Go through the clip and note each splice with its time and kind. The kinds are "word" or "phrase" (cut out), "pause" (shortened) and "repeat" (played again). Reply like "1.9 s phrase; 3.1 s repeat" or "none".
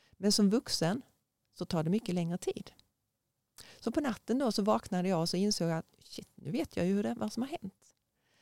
none